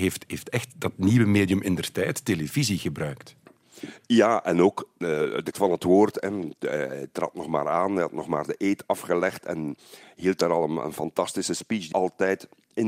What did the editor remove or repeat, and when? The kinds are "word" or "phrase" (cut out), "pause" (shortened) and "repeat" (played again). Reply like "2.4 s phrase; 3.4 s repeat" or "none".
5.5 s word; 11.9 s word